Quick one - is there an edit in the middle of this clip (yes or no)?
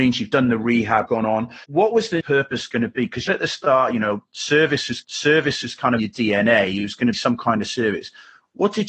yes